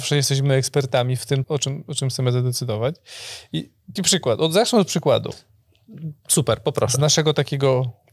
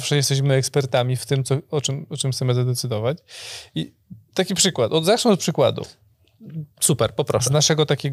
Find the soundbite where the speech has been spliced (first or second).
first